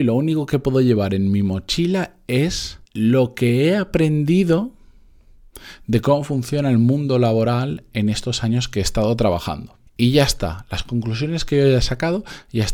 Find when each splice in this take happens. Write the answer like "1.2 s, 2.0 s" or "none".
2.9 s, 9.9 s